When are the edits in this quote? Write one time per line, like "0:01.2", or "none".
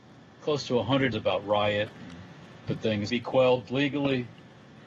0:01.1
0:02.7
0:03.1